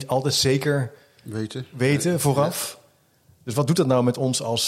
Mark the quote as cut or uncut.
uncut